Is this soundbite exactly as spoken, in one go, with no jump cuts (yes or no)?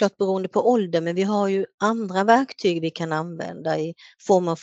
yes